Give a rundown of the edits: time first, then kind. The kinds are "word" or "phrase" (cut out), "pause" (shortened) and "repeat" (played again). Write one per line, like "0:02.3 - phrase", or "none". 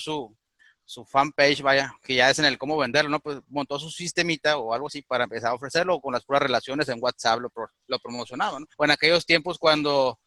0:08.7 - pause